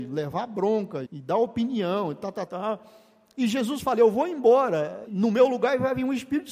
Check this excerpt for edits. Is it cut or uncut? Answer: cut